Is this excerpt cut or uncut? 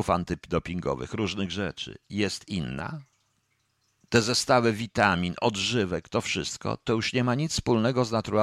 uncut